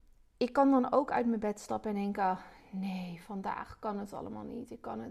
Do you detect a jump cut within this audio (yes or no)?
no